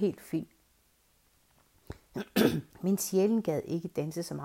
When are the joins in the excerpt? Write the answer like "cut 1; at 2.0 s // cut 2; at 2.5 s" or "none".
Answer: cut 1; at 2.7 s